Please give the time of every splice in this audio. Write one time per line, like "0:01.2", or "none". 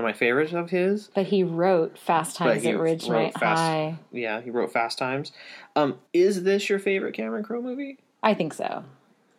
0:06.1